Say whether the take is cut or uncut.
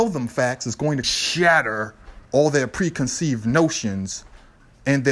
cut